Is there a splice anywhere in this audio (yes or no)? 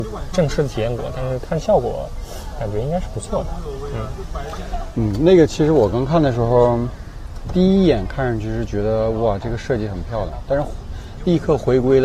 no